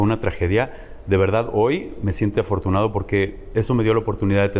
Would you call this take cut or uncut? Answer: cut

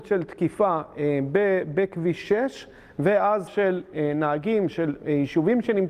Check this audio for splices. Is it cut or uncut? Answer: cut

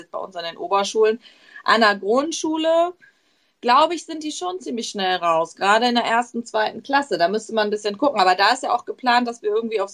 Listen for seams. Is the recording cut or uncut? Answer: uncut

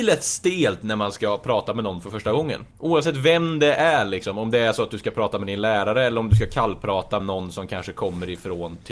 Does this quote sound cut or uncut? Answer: cut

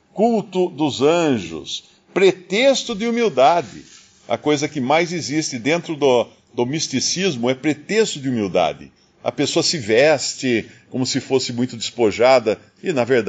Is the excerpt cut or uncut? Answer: uncut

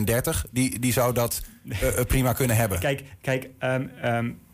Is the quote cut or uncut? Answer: uncut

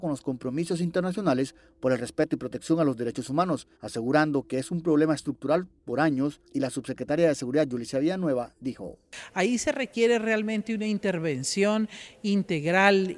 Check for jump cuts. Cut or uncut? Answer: cut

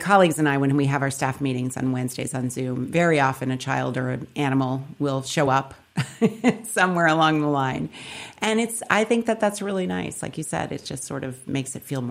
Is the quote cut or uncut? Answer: uncut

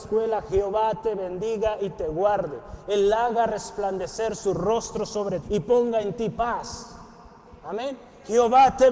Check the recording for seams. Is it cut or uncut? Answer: cut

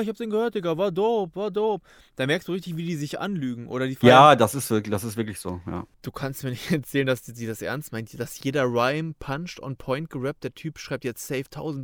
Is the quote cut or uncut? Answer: uncut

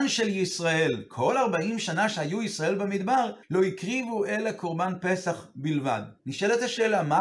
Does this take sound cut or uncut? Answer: cut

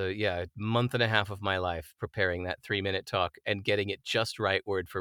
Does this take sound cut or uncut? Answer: uncut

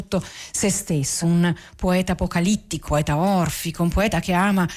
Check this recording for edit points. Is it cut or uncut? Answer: cut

